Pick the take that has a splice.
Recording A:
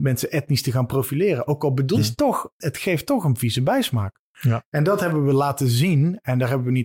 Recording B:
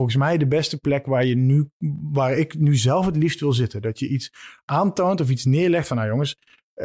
A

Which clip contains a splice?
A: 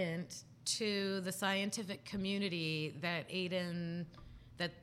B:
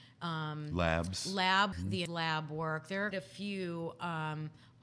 B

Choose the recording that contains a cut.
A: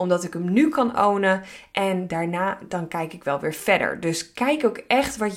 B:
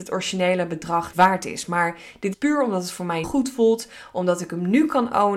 B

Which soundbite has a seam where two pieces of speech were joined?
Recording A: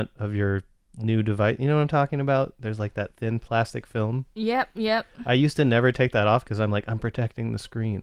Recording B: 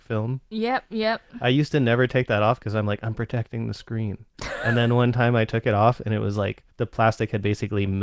B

